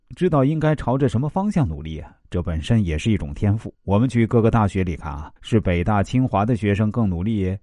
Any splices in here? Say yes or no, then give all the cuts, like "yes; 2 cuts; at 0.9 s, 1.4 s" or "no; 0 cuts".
yes; 2 cuts; at 3.7 s, 5.4 s